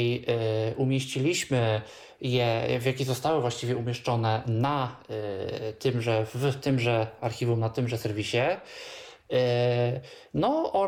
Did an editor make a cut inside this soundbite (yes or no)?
no